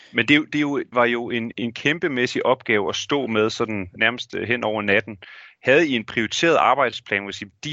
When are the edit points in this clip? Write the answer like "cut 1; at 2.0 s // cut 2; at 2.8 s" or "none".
cut 1; at 0.9 s // cut 2; at 1.5 s // cut 3; at 4.0 s